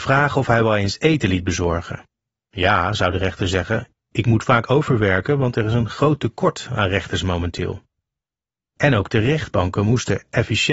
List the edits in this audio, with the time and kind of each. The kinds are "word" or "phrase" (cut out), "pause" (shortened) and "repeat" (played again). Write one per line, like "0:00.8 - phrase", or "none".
none